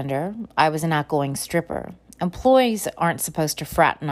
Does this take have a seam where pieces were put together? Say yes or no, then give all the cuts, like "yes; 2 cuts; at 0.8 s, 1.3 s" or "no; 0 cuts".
no; 0 cuts